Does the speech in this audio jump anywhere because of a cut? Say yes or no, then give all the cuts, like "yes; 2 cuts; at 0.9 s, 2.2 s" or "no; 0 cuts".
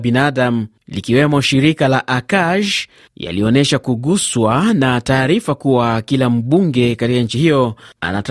no; 0 cuts